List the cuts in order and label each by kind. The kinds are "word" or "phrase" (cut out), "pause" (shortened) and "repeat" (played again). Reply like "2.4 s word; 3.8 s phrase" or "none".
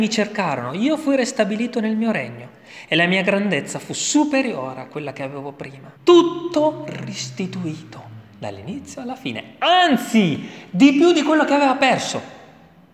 6.0 s pause; 8.3 s pause

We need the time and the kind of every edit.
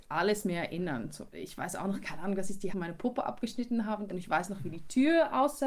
2.7 s word; 4.1 s word

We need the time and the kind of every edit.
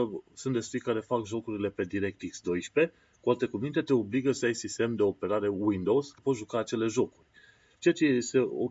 6.2 s word

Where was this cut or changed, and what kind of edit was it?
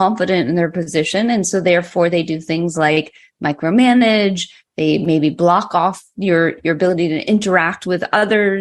none

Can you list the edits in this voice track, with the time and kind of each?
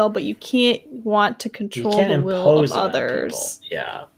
none

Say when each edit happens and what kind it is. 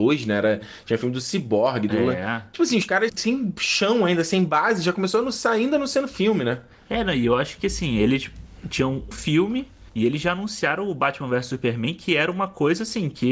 3.1 s word; 9.1 s word; 9.9 s pause

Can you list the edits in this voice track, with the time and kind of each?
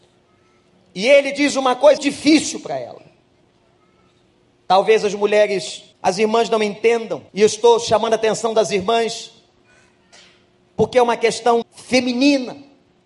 2.0 s word; 5.9 s pause; 7.3 s pause; 11.6 s word

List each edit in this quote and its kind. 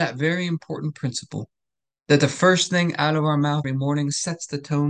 3.6 s word

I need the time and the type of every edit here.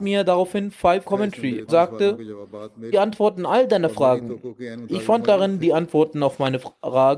1.0 s word; 1.7 s word; 2.9 s phrase

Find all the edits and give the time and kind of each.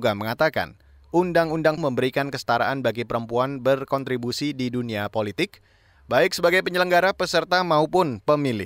1.8 s word

